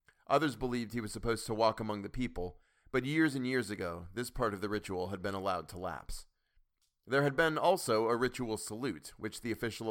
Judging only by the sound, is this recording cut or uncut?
uncut